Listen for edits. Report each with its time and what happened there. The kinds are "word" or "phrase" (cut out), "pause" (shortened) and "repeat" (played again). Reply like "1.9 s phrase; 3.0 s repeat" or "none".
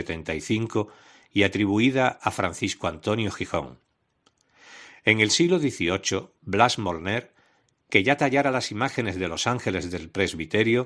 none